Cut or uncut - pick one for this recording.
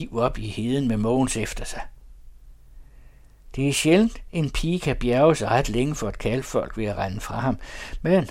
uncut